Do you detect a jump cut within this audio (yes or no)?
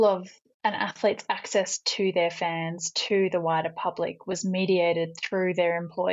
no